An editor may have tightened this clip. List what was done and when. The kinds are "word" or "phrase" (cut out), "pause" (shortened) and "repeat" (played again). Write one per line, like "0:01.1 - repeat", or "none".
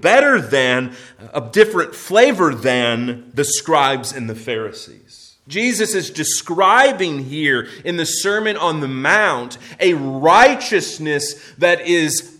0:05.4 - pause